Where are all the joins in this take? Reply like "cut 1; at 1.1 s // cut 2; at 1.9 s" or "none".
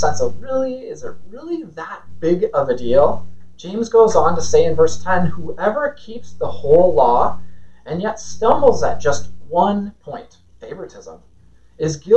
cut 1; at 10.5 s